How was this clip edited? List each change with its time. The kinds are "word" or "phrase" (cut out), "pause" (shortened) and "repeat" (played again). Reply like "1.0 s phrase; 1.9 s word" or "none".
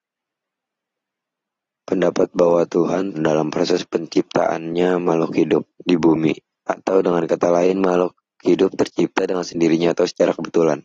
3.1 s phrase; 5.7 s pause; 6.5 s pause